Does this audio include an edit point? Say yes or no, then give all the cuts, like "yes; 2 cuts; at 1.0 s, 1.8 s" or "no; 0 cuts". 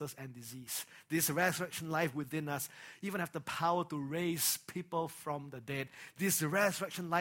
no; 0 cuts